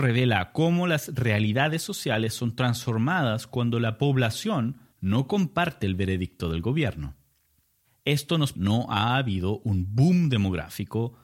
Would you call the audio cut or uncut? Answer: cut